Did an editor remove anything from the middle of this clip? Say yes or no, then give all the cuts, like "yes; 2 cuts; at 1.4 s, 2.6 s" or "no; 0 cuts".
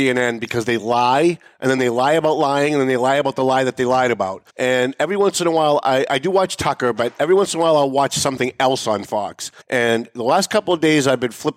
yes; 2 cuts; at 4.5 s, 9.6 s